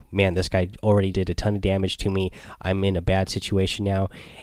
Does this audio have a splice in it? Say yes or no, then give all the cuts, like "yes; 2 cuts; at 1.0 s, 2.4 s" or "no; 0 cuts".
yes; 1 cut; at 1.1 s